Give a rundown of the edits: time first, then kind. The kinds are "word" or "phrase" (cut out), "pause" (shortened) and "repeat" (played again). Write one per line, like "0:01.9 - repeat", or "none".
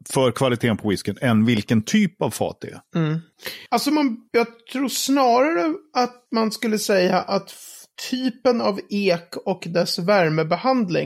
0:03.7 - pause